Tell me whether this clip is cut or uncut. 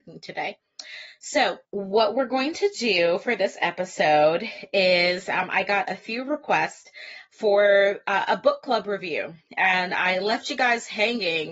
cut